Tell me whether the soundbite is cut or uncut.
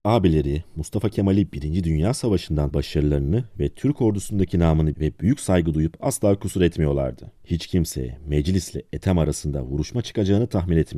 cut